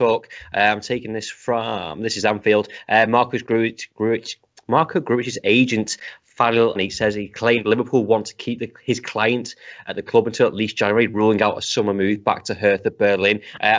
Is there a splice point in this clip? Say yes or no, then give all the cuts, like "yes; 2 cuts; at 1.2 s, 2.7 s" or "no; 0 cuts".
yes; 1 cut; at 6.7 s